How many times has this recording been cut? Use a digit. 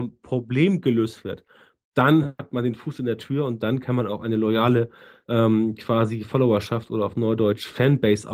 0